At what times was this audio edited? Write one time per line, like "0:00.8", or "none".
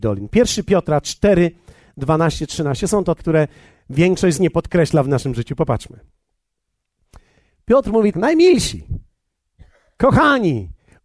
0:03.2
0:04.4
0:08.1